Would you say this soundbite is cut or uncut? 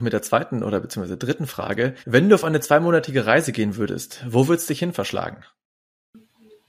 cut